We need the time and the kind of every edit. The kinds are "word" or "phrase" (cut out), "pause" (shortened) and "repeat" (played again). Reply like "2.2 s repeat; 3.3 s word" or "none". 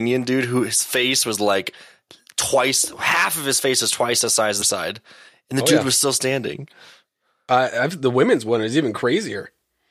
4.6 s phrase